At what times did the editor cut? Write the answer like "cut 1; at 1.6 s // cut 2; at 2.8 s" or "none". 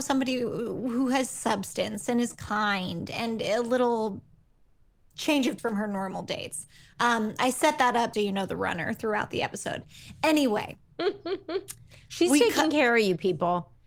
cut 1; at 5.6 s // cut 2; at 8.1 s